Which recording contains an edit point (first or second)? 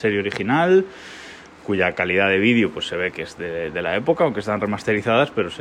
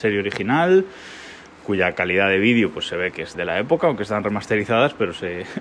second